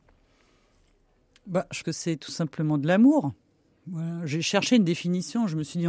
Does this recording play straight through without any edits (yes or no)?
no